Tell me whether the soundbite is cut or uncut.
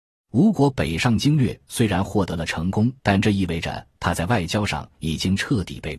cut